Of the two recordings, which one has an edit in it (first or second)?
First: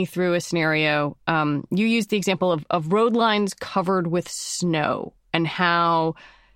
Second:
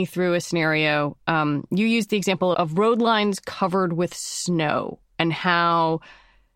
second